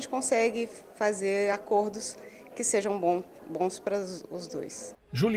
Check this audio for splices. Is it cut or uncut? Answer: uncut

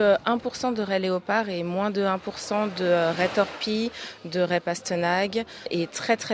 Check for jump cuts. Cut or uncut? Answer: uncut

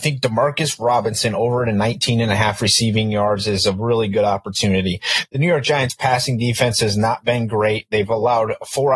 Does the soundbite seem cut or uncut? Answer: uncut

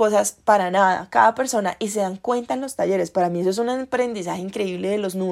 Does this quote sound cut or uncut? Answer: uncut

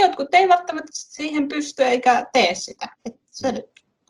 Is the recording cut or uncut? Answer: cut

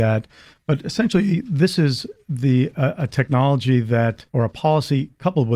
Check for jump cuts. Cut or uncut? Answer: cut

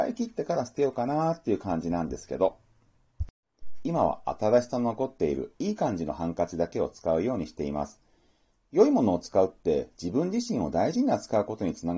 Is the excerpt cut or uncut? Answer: uncut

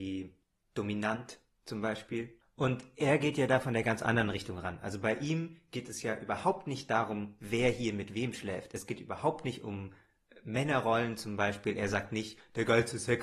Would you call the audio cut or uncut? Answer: uncut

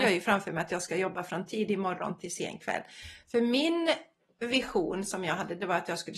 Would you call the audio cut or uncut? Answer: uncut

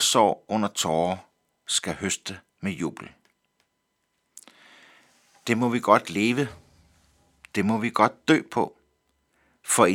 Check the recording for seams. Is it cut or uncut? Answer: uncut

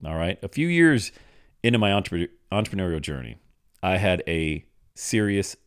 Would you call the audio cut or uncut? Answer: uncut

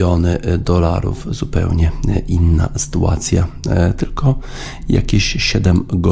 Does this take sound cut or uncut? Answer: uncut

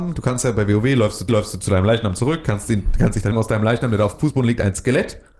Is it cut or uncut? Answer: cut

